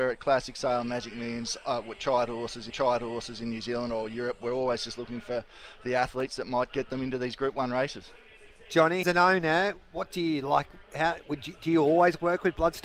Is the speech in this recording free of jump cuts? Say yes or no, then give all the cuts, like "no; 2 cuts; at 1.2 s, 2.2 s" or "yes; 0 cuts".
no; 2 cuts; at 2.7 s, 9.0 s